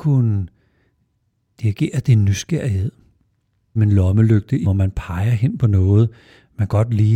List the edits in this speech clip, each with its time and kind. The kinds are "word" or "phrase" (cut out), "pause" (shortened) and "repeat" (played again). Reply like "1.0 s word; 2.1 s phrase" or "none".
3.8 s word; 4.6 s word